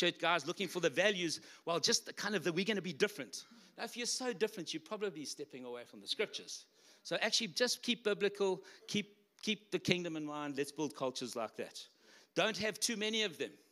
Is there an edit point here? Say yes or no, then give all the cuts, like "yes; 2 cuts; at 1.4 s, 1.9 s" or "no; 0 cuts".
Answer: no; 0 cuts